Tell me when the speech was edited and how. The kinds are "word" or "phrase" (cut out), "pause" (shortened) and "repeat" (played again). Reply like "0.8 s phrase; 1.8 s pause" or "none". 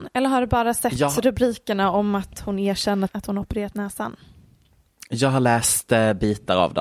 3.1 s word